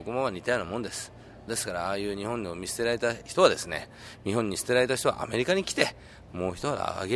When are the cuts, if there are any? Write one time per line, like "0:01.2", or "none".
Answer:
0:01.5